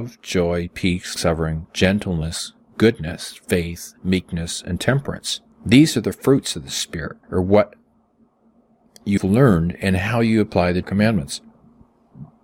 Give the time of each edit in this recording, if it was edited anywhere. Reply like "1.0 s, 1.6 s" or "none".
1.2 s, 5.5 s, 7.2 s, 9.2 s, 10.8 s